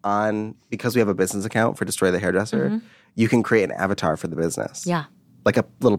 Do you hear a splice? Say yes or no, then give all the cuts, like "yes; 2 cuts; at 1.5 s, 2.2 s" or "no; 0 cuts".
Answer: no; 0 cuts